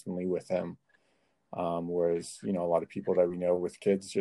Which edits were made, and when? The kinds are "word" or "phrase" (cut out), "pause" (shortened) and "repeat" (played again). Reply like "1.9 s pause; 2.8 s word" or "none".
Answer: none

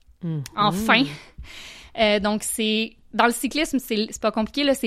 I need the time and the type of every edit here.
none

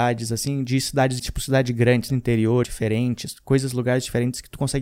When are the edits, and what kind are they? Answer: 1.2 s word; 2.1 s word; 2.6 s word

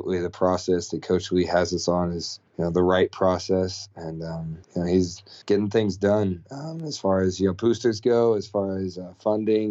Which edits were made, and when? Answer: 2.5 s pause; 4.6 s pause; 5.4 s pause

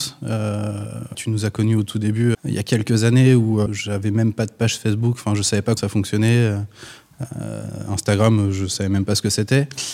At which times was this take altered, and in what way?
1.1 s word; 2.3 s word; 3.7 s word; 5.8 s word

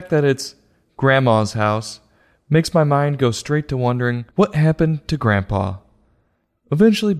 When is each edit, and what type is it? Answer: 4.3 s pause

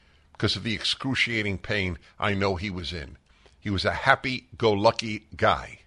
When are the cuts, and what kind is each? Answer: none

